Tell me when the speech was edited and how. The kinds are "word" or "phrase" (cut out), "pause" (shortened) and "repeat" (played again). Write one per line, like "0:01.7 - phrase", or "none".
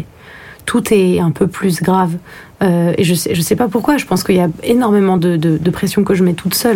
none